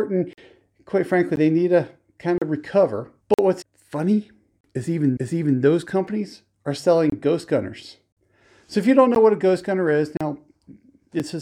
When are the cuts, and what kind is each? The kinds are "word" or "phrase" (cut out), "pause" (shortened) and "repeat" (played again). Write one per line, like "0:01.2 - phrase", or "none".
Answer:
0:03.2 - pause
0:03.6 - word
0:05.2 - repeat